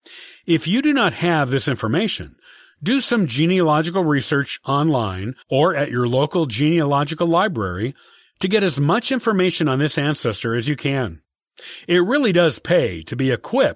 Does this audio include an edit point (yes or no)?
yes